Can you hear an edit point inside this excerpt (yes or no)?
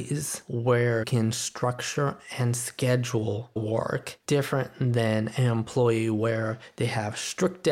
yes